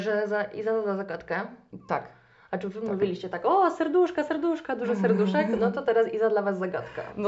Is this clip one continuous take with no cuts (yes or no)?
yes